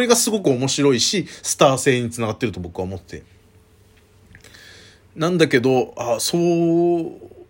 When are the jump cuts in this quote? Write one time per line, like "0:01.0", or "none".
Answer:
none

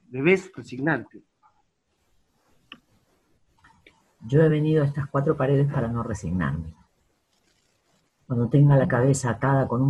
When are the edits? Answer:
none

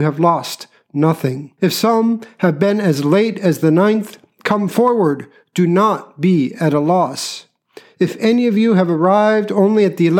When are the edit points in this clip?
0:01.6

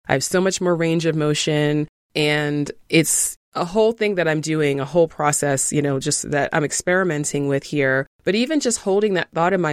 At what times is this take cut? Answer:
0:02.8
0:08.1

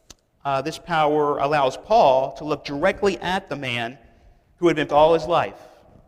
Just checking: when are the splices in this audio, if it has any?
0:04.9

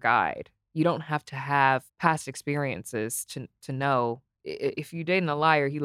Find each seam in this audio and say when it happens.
0:01.9

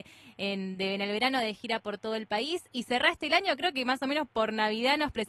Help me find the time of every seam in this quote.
none

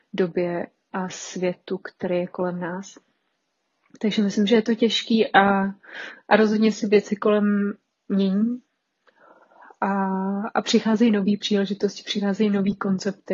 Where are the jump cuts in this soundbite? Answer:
none

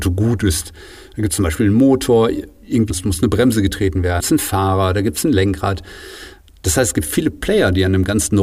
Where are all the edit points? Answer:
0:02.9
0:04.2

